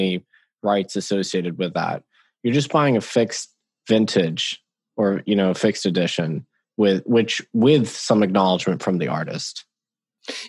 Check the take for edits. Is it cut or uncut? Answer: uncut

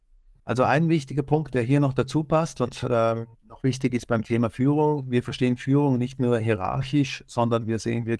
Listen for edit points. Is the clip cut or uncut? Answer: cut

